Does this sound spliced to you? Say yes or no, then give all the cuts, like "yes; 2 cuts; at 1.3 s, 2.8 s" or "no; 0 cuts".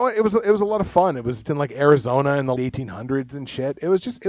yes; 2 cuts; at 1.4 s, 2.6 s